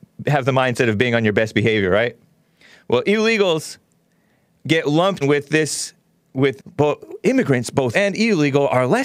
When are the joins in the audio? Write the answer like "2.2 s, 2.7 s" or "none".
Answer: 5.2 s, 6.6 s, 7.9 s